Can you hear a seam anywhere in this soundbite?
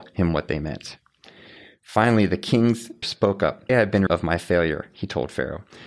yes; 3 cuts; at 3.0 s, 3.7 s, 4.1 s

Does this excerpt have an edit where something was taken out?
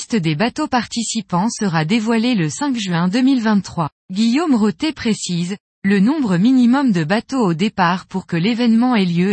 yes; 1 cut; at 4.0 s

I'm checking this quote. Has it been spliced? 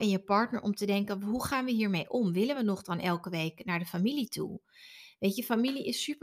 no; 0 cuts

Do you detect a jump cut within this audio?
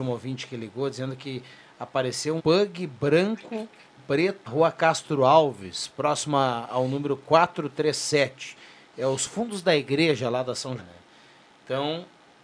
yes; 4 cuts; at 2.4 s, 4.0 s, 4.5 s, 10.8 s

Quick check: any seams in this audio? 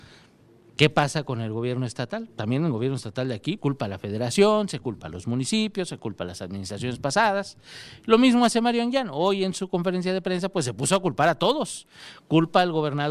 yes; 1 cut; at 3.6 s

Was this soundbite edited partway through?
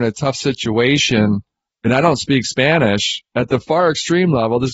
no; 0 cuts

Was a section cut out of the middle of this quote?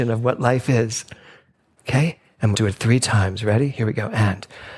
yes; 1 cut; at 2.5 s

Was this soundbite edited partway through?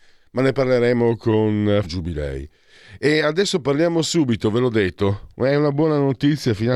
yes; 1 cut; at 1.8 s

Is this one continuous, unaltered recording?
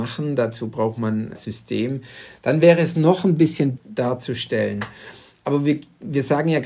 no; 2 cuts; at 1.3 s, 3.8 s

